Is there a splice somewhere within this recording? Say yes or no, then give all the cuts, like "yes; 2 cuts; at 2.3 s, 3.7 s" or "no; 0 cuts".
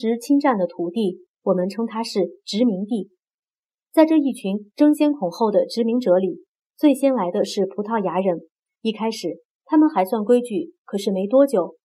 no; 0 cuts